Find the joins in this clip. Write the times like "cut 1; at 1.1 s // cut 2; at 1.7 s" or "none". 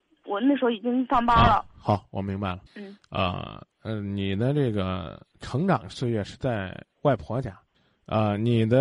cut 1; at 2.7 s // cut 2; at 3.7 s // cut 3; at 7.7 s

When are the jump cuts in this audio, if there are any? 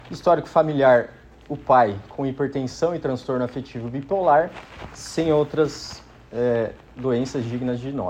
none

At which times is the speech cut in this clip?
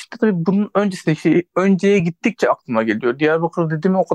none

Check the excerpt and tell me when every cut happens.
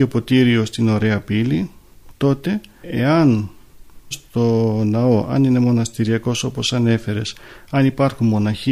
cut 1; at 4.1 s

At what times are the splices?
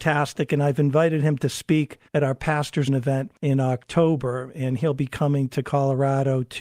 cut 1; at 2.1 s // cut 2; at 2.9 s // cut 3; at 3.4 s

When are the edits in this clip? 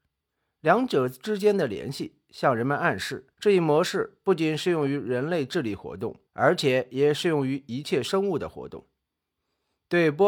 cut 1; at 3.3 s // cut 2; at 6.3 s

